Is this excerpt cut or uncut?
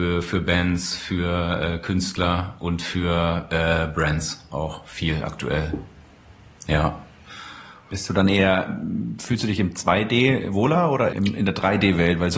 cut